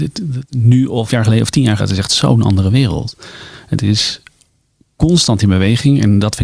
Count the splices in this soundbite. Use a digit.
2